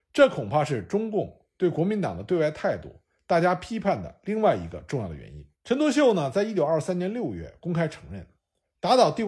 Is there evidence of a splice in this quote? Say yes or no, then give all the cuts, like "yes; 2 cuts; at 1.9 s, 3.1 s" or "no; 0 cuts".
yes; 1 cut; at 5.5 s